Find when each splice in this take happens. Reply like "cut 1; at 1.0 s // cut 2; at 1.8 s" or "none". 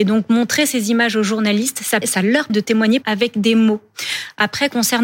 cut 1; at 2.0 s // cut 2; at 2.5 s // cut 3; at 3.0 s